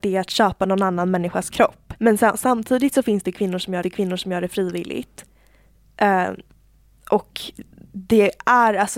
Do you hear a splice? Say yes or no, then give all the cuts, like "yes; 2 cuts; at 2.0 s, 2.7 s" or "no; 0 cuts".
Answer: yes; 2 cuts; at 2.0 s, 3.8 s